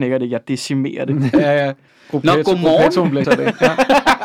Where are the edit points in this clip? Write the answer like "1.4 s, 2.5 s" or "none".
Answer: 1.3 s, 1.9 s, 3.2 s

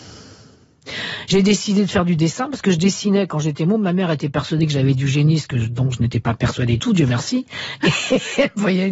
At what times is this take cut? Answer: 6.8 s

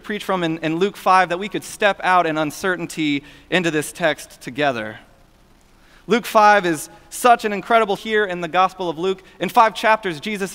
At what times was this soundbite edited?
8.0 s

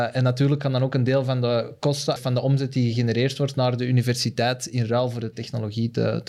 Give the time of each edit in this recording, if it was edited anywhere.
2.2 s

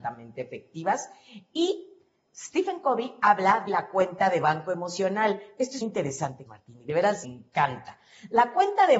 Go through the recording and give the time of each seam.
3.7 s, 5.8 s, 6.5 s, 7.2 s

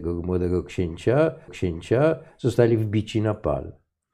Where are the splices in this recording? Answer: 1.5 s

